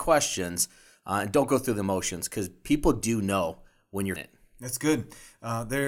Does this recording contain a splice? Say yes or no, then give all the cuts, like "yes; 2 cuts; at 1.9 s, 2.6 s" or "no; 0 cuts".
yes; 1 cut; at 4.2 s